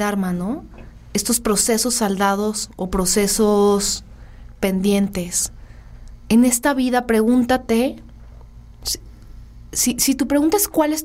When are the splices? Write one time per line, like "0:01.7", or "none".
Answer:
none